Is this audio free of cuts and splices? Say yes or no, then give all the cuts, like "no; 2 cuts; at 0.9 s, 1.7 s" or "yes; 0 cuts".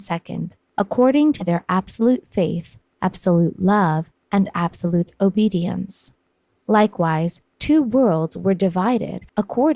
yes; 0 cuts